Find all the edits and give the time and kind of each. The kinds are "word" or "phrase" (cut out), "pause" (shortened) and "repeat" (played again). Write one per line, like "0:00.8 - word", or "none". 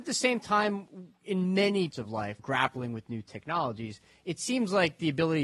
0:01.9 - word
0:02.4 - word